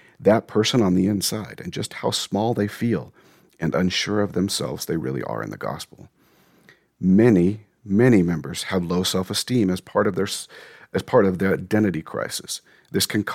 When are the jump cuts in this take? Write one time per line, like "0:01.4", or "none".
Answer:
none